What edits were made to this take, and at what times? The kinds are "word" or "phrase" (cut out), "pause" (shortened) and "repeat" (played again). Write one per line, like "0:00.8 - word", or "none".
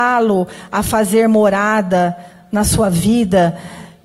none